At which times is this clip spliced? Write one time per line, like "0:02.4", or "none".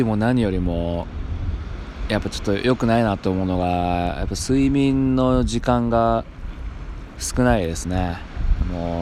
none